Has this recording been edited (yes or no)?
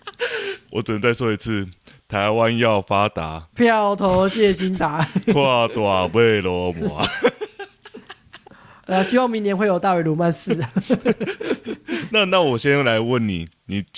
no